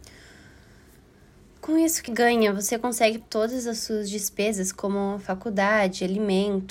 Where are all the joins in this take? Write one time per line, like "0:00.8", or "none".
0:02.1
0:03.2

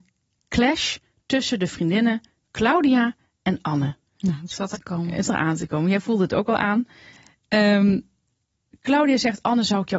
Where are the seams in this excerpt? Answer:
0:04.7
0:05.2

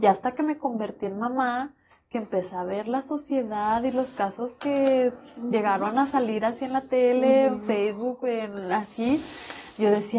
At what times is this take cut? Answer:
none

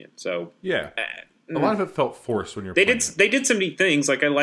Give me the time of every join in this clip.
none

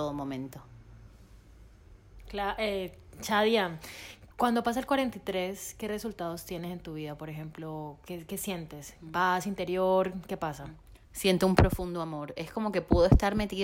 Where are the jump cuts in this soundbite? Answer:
0:04.3
0:11.0

